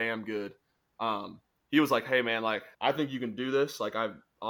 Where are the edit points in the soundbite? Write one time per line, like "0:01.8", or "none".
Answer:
0:01.5
0:02.7